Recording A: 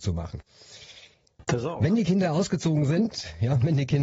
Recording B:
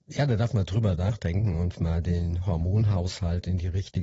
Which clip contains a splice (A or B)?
B